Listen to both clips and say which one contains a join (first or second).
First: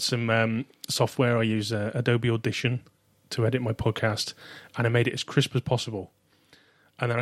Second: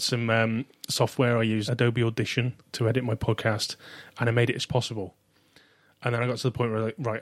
second